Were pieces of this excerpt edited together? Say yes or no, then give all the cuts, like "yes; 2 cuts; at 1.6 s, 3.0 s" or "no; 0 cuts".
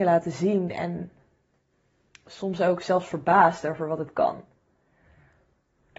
no; 0 cuts